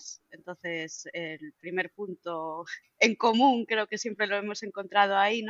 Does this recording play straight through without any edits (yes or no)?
yes